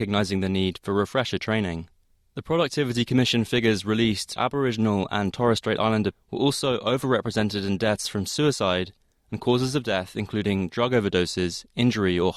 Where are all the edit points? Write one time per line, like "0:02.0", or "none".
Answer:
0:04.4
0:06.1